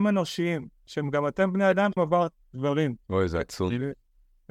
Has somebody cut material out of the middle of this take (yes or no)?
yes